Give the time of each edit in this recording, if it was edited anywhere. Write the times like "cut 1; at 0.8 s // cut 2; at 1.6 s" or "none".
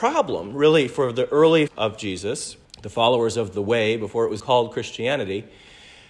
cut 1; at 1.7 s // cut 2; at 2.6 s // cut 3; at 4.4 s